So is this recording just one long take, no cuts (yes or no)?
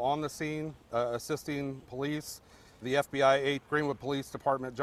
no